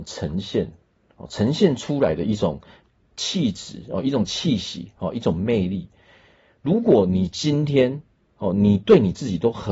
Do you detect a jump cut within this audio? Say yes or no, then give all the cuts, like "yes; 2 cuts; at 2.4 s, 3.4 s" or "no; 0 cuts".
no; 0 cuts